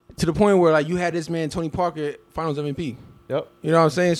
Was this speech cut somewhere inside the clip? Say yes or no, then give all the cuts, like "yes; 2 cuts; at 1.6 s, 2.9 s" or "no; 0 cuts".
no; 0 cuts